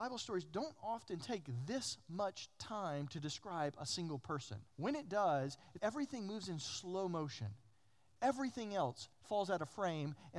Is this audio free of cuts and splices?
no; 3 cuts; at 4.7 s, 5.8 s, 9.1 s

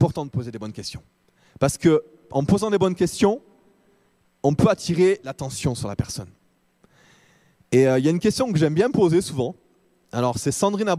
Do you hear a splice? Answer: no; 0 cuts

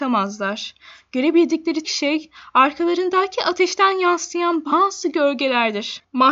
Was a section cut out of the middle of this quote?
yes; 1 cut; at 1.8 s

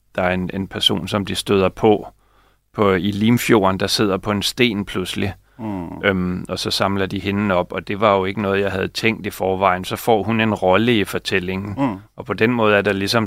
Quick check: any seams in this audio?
no; 0 cuts

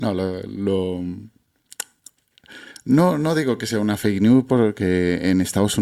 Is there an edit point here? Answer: no; 0 cuts

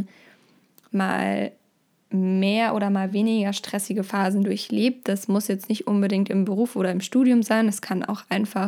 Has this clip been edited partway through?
no; 0 cuts

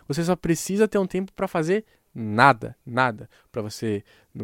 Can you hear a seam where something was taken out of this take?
yes; 1 cut; at 2.8 s

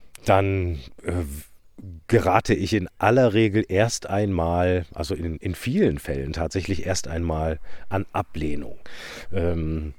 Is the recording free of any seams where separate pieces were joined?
yes; 0 cuts

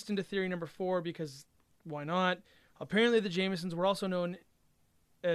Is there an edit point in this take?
no; 0 cuts

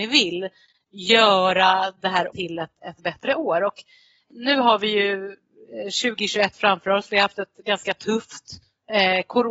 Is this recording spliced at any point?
yes; 1 cut; at 2.3 s

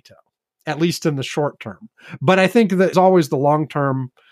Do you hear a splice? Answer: yes; 1 cut; at 2.9 s

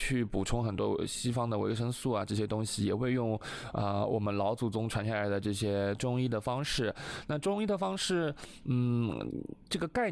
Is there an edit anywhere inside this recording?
no; 0 cuts

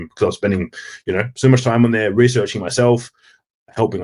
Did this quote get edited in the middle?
no; 0 cuts

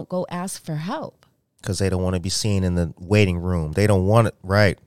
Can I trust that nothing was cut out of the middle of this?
yes; 0 cuts

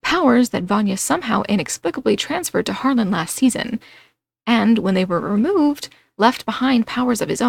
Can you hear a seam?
no; 0 cuts

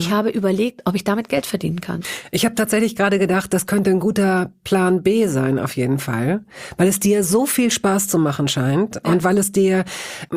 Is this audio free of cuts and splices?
yes; 0 cuts

